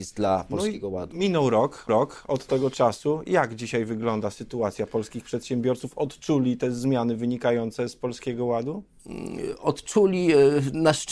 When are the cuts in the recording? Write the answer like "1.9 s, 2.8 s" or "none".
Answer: 1.9 s